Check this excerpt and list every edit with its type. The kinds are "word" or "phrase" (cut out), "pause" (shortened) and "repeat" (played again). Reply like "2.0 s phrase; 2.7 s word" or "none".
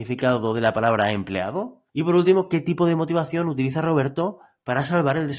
1.9 s pause